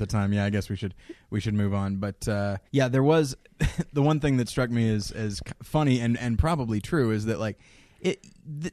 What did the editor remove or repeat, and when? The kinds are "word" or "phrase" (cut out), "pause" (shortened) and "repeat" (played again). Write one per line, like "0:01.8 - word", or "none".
0:02.7 - pause
0:03.4 - pause